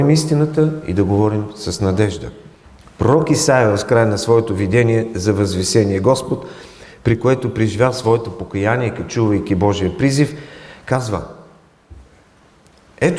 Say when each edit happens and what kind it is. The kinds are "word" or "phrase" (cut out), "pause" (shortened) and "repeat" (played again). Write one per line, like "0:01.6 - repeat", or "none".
0:02.8 - pause